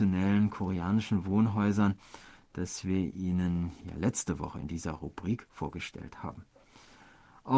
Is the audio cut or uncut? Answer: uncut